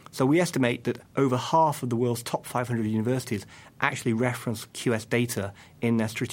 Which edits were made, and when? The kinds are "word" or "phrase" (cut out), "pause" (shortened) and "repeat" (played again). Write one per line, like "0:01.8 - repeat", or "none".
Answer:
0:01.0 - pause